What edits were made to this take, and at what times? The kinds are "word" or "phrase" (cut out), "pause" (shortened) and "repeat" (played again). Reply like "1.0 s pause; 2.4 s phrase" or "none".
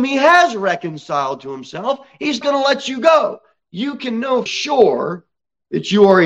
2.4 s word; 4.5 s word